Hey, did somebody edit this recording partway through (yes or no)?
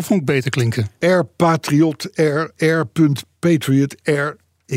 yes